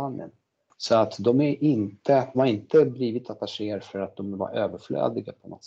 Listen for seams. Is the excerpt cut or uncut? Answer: cut